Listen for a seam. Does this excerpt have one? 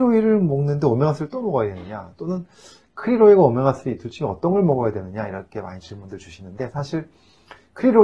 no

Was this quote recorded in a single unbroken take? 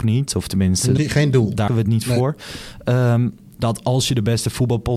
no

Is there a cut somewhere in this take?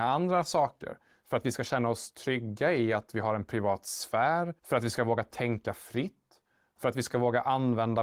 yes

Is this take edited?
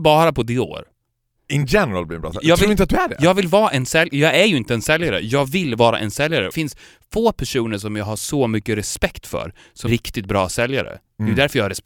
yes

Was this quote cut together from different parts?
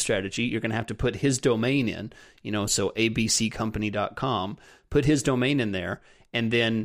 no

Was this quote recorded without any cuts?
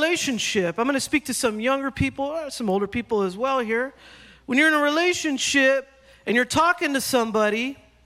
yes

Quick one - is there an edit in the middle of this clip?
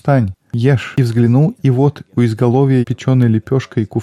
yes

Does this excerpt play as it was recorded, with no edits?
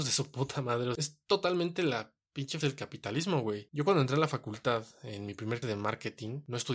no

